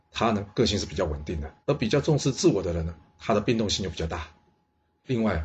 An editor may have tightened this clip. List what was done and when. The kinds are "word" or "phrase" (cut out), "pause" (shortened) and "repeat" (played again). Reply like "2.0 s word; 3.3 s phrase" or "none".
1.6 s pause